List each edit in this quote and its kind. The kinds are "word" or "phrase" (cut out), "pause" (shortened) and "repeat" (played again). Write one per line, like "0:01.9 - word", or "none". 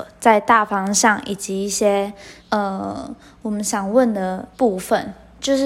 0:02.4 - pause
0:04.5 - pause